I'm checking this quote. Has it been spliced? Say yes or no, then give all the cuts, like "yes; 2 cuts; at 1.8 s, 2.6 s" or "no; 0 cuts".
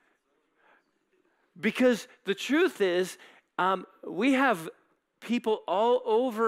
no; 0 cuts